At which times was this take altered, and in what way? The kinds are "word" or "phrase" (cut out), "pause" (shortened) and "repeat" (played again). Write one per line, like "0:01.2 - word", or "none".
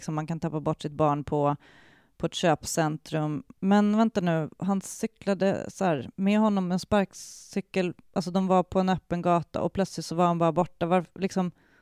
none

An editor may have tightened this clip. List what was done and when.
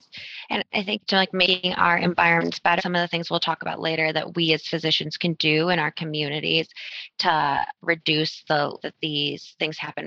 0:01.1 - word
0:02.8 - word
0:08.8 - word

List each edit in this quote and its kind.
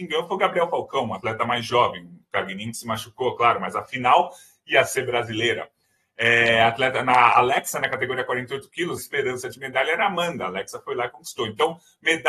0:09.0 - phrase

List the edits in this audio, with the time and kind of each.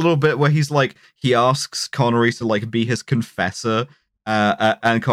none

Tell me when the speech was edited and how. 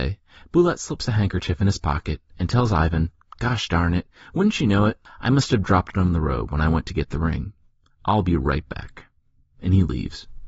none

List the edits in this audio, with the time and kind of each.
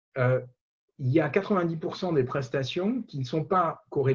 none

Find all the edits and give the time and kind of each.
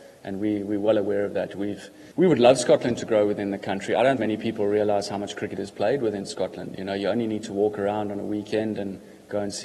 0:02.1 - pause
0:04.2 - word

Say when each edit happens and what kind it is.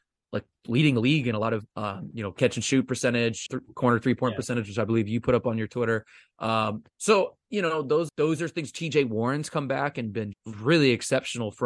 0:01.7 - pause
0:03.5 - word
0:06.9 - pause
0:08.1 - word
0:10.3 - word

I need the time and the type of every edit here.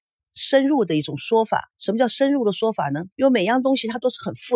0:01.7 - pause
0:03.1 - pause

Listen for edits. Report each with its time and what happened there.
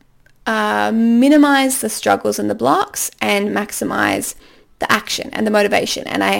none

